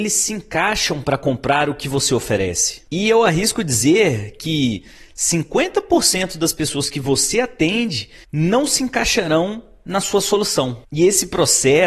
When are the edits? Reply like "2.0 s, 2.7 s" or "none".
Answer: none